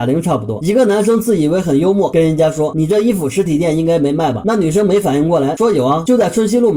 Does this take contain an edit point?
no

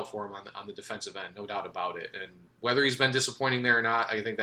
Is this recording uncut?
yes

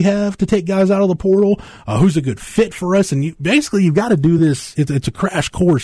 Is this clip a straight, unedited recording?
yes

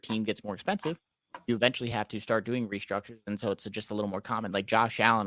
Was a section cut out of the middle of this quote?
no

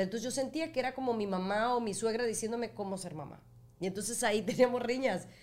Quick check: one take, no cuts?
yes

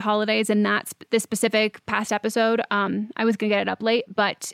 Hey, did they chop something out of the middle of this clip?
no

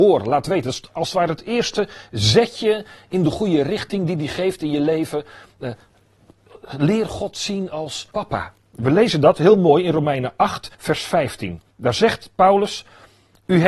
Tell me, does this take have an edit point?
yes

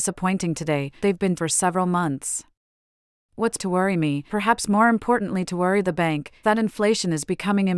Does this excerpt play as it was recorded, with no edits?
no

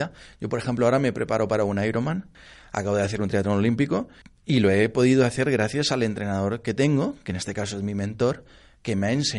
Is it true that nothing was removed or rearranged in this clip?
no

